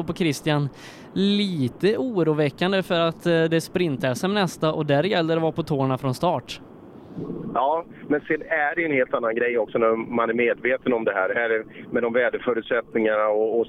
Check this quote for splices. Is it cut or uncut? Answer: uncut